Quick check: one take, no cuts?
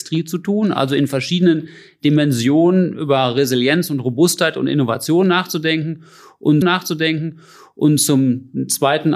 no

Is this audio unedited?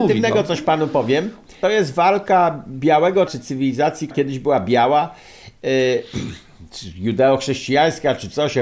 no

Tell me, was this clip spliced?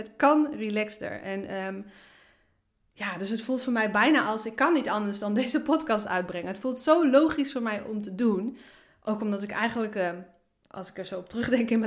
no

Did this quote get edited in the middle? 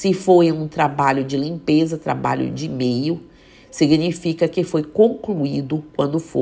no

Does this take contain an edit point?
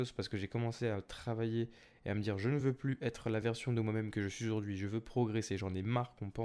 no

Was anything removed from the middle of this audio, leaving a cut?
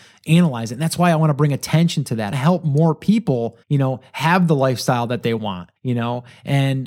yes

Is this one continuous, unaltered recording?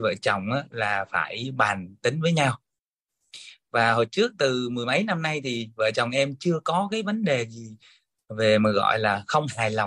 yes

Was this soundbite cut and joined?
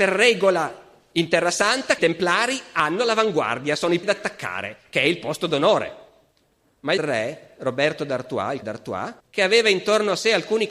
yes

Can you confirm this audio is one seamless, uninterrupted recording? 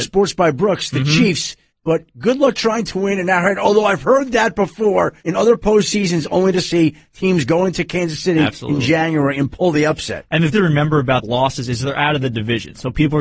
no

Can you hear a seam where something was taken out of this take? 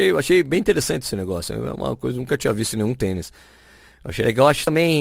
no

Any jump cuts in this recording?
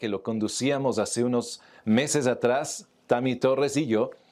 no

